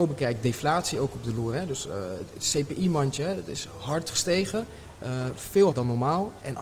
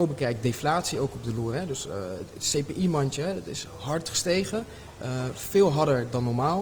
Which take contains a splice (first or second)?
first